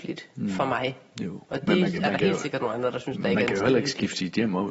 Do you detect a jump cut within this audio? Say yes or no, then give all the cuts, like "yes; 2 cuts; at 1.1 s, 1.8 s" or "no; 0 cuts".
no; 0 cuts